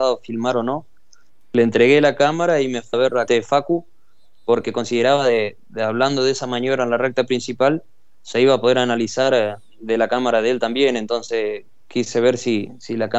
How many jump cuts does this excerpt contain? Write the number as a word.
two